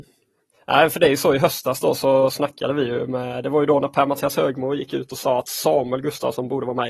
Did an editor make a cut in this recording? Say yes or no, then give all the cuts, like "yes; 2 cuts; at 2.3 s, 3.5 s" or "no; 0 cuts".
no; 0 cuts